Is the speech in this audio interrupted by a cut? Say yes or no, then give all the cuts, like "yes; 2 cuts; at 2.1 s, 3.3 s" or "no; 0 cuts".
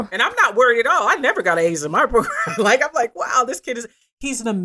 no; 0 cuts